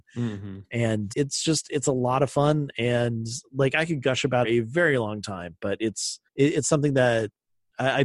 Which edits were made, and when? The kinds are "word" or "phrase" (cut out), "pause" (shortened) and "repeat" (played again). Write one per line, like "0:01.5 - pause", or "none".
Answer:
0:01.1 - word
0:04.4 - phrase
0:06.3 - pause